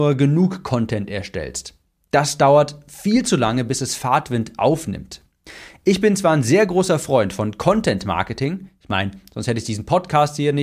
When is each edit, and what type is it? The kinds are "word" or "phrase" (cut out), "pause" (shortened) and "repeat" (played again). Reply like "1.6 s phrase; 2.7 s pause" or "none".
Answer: none